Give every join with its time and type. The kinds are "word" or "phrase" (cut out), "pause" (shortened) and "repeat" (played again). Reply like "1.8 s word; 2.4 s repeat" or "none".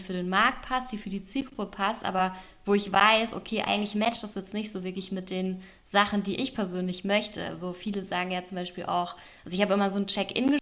none